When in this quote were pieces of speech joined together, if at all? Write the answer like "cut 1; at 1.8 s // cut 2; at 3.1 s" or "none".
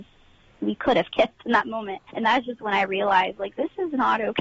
cut 1; at 2.1 s